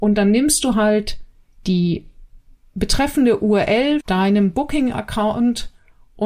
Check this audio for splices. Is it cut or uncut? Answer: cut